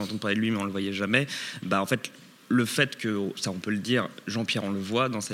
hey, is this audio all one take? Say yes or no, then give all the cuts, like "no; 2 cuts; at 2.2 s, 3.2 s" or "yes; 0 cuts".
yes; 0 cuts